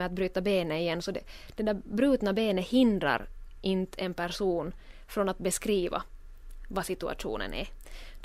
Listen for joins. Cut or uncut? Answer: uncut